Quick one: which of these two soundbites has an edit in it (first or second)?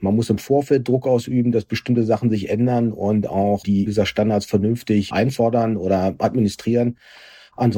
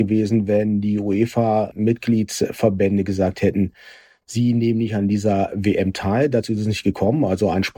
first